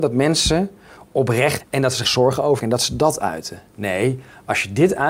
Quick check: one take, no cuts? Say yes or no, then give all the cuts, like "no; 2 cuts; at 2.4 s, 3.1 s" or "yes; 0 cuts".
no; 3 cuts; at 1.6 s, 2.0 s, 2.6 s